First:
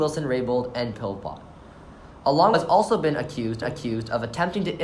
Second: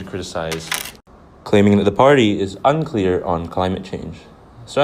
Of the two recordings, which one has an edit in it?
first; 3 cuts; at 0.9 s, 2.5 s, 3.6 s

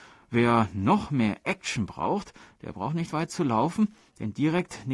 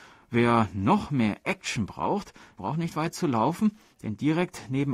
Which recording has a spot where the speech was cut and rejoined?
second; 1 cut; at 2.6 s

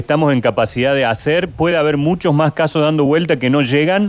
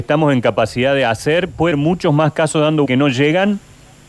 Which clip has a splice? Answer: second; 2 cuts; at 1.7 s, 2.9 s

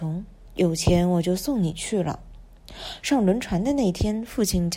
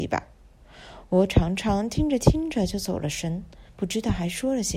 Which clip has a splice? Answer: second; 1 cut; at 3.7 s

